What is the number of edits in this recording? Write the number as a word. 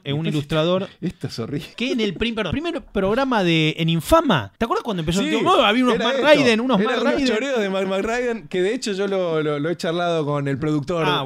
four